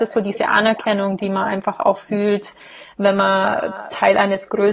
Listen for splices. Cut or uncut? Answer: uncut